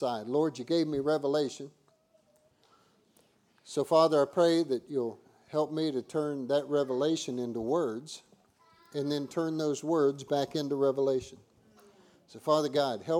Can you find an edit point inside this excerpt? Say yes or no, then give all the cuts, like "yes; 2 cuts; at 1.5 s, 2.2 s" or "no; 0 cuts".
no; 0 cuts